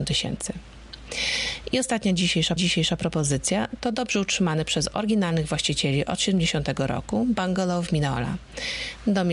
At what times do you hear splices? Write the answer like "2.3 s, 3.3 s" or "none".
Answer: 2.6 s